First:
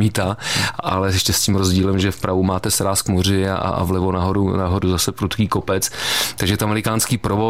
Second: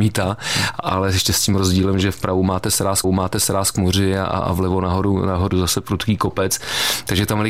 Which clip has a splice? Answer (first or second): second